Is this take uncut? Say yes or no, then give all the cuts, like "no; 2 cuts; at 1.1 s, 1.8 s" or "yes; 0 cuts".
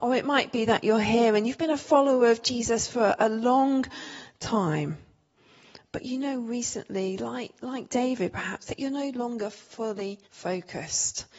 no; 1 cut; at 10.2 s